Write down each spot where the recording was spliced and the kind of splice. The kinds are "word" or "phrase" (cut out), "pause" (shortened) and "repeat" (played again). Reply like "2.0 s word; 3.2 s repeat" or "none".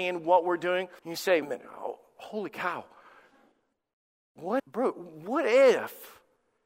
1.0 s pause; 1.4 s phrase; 4.6 s word